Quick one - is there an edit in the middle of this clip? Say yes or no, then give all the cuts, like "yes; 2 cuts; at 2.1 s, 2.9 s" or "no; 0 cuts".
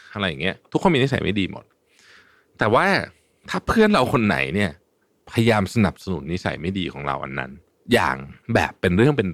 yes; 1 cut; at 8.4 s